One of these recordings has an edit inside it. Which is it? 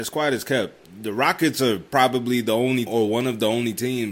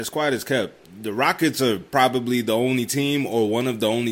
first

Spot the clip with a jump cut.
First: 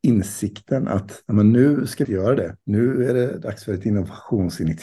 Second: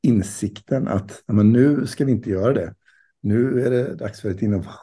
first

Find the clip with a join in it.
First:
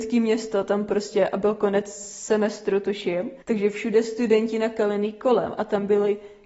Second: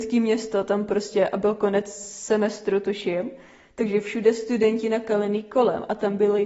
first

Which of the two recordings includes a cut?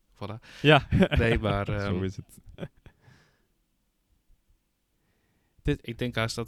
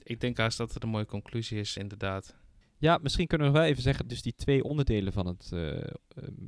second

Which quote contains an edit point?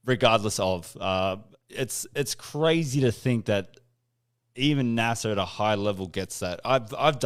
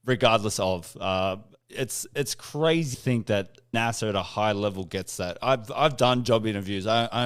second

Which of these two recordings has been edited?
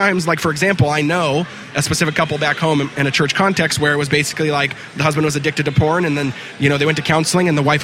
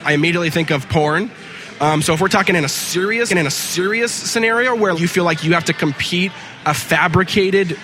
second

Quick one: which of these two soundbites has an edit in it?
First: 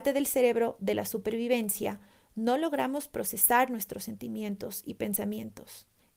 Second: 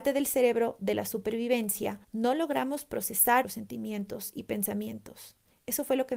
second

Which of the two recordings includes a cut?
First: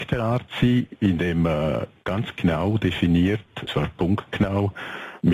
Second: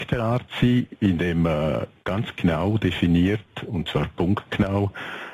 first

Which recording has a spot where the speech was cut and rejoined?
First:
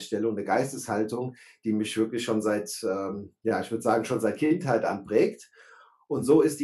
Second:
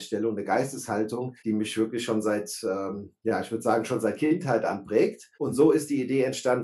second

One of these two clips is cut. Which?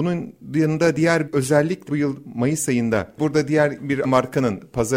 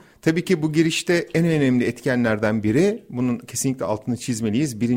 first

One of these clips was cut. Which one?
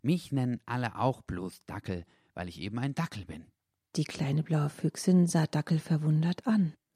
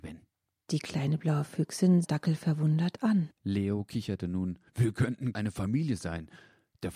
second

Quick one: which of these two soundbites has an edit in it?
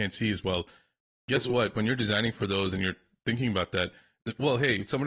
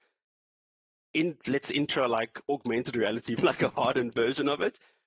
second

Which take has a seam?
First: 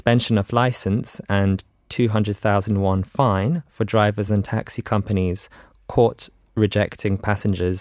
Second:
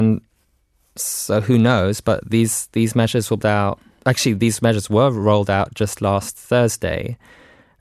second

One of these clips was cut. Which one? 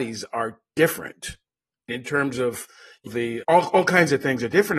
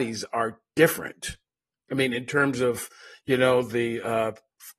first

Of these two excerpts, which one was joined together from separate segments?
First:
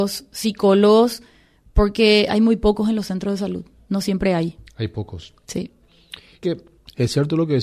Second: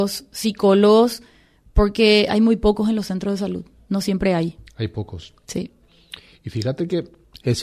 first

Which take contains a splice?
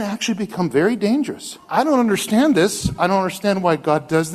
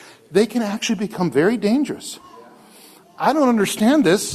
first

